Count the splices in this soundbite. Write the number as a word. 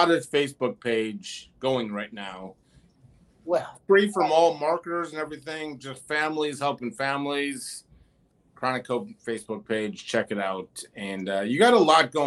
zero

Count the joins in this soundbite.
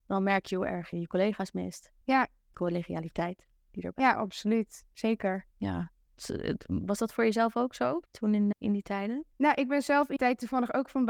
eight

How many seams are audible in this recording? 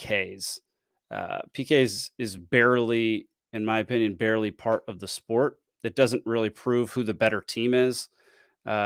zero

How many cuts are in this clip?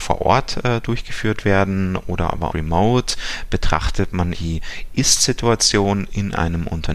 two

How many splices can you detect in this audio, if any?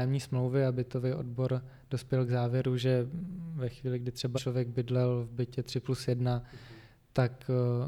one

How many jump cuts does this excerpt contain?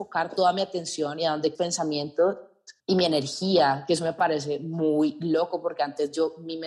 two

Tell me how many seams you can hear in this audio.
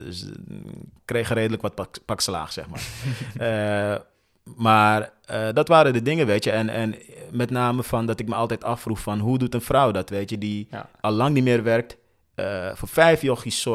zero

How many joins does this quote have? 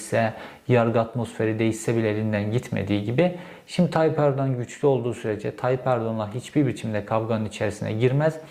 zero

